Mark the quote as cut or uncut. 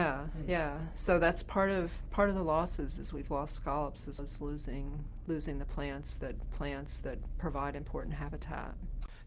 cut